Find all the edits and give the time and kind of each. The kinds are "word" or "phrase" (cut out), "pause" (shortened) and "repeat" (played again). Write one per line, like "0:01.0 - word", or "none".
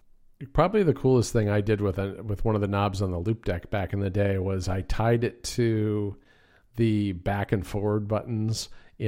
none